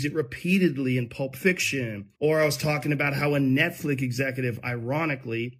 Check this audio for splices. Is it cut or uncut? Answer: cut